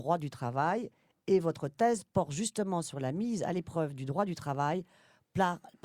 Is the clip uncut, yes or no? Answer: yes